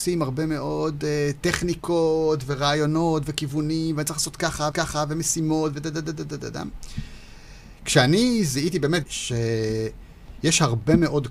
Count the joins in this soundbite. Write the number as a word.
two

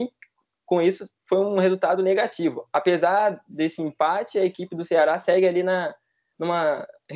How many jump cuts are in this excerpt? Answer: zero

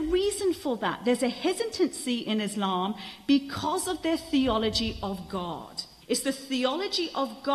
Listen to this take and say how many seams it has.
one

